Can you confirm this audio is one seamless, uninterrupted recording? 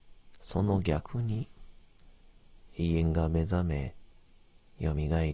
yes; 0 cuts

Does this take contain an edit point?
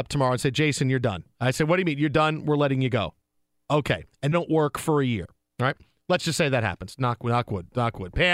yes; 1 cut; at 4.3 s

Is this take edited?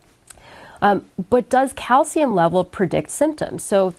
no; 0 cuts

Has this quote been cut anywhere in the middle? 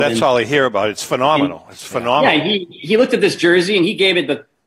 no; 0 cuts

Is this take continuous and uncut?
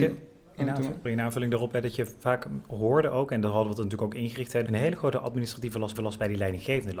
no; 3 cuts; at 1.0 s, 4.7 s, 5.9 s

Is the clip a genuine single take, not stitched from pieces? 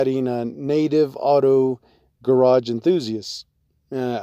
yes; 0 cuts

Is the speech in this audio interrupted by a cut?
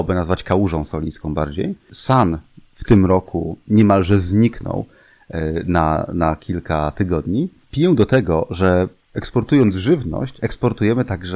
no; 0 cuts

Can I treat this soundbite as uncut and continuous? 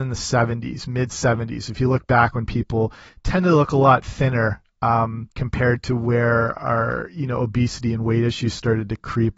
no; 2 cuts; at 3.1 s, 5.3 s

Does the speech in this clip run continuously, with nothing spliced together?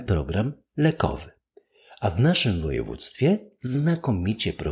yes; 0 cuts

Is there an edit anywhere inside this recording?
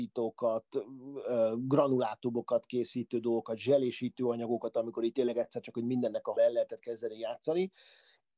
yes; 1 cut; at 6.4 s

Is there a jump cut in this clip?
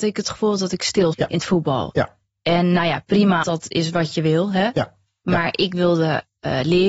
yes; 2 cuts; at 1.1 s, 3.4 s

